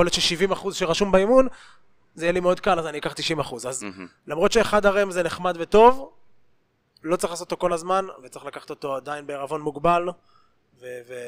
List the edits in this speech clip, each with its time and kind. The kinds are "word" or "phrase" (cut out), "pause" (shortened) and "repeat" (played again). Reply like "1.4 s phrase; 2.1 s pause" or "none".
none